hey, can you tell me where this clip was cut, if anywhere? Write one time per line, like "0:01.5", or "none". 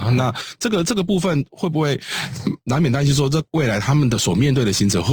0:03.5